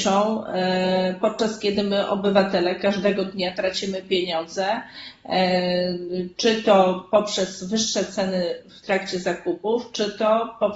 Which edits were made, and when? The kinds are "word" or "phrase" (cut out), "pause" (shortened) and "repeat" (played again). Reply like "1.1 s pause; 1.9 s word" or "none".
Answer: none